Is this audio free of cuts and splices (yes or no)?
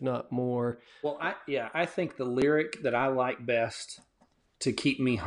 yes